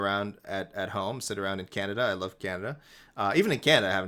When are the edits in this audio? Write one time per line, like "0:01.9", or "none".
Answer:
none

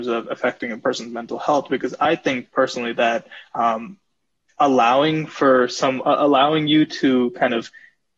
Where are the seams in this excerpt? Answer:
none

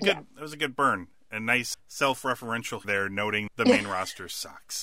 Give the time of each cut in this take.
0:01.7
0:02.8
0:03.5

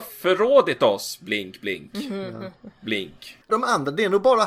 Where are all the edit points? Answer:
0:03.5

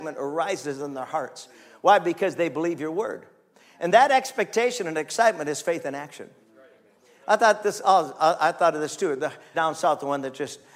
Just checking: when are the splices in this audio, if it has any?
0:09.5

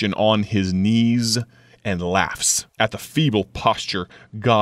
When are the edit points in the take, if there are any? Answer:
0:02.7

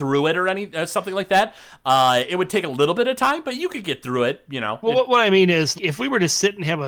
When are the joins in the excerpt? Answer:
0:05.7

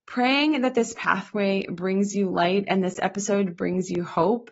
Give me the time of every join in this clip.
none

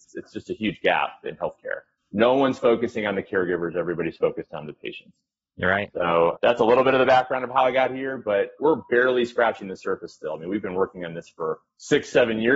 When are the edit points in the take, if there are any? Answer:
0:06.3

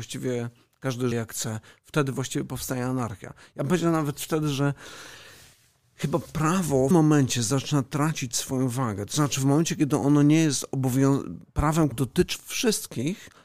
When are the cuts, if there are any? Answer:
0:01.1
0:06.9
0:11.9
0:12.3

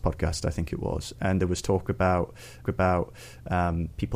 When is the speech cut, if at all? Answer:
0:02.6

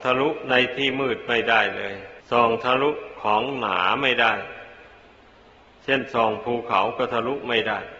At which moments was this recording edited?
0:02.2

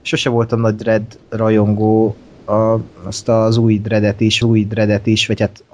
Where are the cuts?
0:02.9
0:04.4

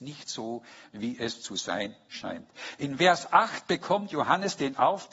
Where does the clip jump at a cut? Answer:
none

